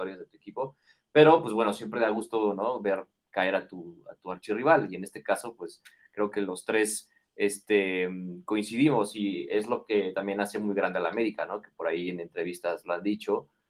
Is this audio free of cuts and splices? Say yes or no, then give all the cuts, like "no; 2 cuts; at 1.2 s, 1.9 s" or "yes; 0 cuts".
yes; 0 cuts